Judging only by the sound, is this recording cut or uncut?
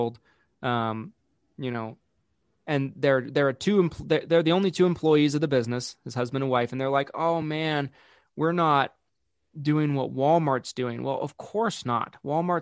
uncut